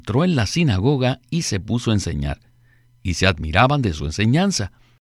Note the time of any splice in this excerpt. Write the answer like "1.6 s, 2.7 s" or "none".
none